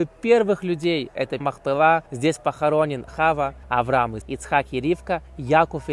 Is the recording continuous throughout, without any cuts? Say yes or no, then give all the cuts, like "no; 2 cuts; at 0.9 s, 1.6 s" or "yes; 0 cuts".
no; 5 cuts; at 1.4 s, 2.1 s, 3.1 s, 3.6 s, 4.2 s